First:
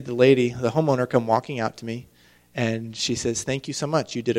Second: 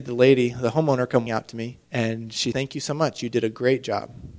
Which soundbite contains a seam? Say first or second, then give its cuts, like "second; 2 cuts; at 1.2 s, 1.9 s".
second; 3 cuts; at 1.3 s, 1.8 s, 2.5 s